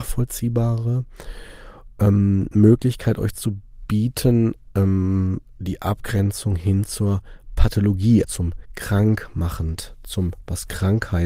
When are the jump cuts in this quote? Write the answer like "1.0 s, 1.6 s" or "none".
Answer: 8.2 s

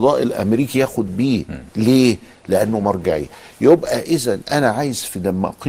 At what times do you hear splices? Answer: none

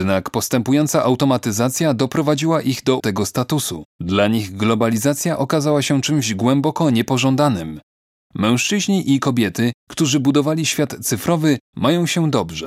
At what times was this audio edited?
3.0 s, 3.9 s

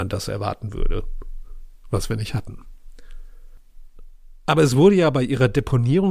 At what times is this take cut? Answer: none

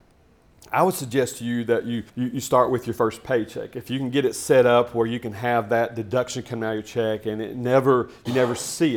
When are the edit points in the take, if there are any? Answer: 2.1 s

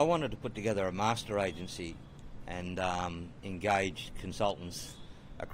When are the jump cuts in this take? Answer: none

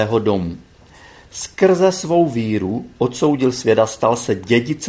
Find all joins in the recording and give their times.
none

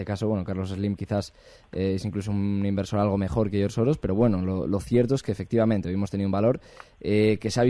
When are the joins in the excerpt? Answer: none

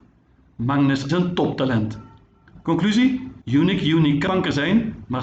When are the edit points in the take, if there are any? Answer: 1.1 s, 3.4 s, 4.3 s

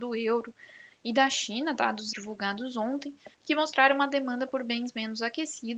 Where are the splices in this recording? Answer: 2.1 s, 3.3 s

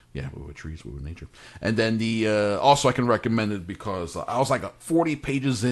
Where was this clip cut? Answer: 4.8 s

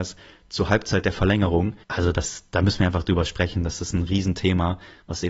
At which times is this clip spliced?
1.8 s

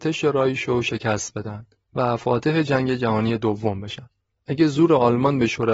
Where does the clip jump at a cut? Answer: none

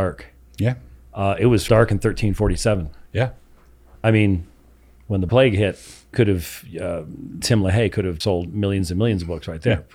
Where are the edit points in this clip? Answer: 1.7 s, 4.0 s, 5.3 s, 6.1 s, 7.4 s, 8.2 s

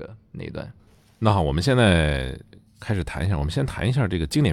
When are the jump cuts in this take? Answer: none

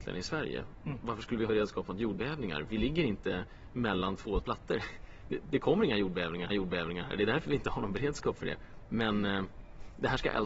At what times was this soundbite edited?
1.5 s, 4.4 s, 6.5 s

